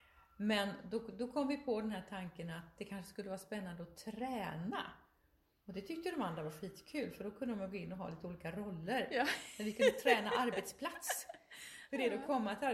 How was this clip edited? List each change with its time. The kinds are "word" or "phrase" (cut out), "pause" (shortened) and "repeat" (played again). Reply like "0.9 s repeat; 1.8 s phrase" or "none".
none